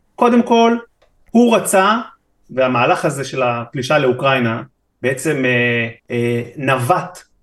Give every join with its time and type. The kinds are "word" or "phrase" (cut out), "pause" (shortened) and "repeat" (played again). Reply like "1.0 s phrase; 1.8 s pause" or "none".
6.0 s pause